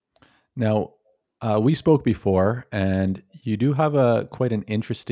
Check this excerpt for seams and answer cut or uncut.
uncut